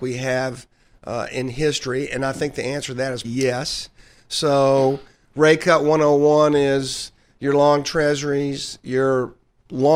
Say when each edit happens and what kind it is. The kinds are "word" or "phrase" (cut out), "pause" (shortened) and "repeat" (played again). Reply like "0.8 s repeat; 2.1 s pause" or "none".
3.2 s word